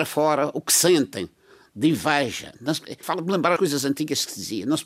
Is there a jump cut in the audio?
yes; 2 cuts; at 3.0 s, 3.6 s

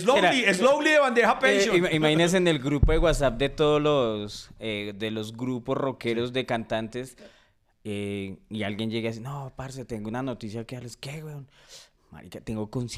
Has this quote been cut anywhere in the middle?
no; 0 cuts

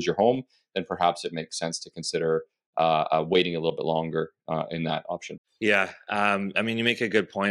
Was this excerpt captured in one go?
yes; 0 cuts

